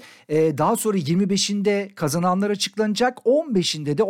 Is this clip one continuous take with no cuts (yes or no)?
yes